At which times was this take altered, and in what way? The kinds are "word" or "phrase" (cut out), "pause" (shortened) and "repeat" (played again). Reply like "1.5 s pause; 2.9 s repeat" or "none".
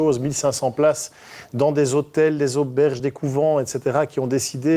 none